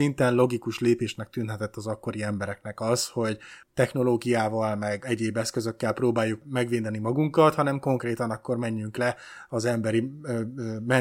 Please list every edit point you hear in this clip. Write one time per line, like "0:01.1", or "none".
0:05.0